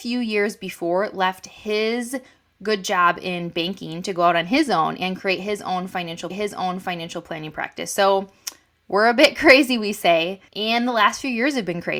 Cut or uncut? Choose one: cut